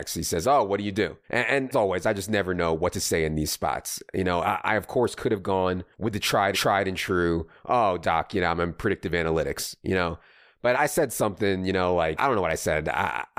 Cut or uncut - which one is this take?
cut